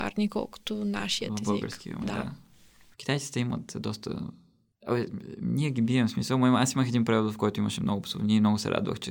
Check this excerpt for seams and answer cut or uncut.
uncut